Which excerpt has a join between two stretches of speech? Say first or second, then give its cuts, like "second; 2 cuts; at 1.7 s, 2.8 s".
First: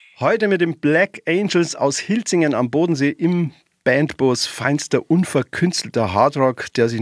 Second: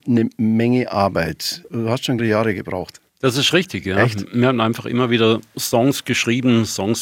second; 2 cuts; at 2.2 s, 3.1 s